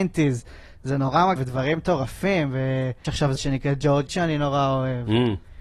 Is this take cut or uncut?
cut